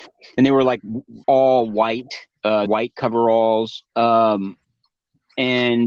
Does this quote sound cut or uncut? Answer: cut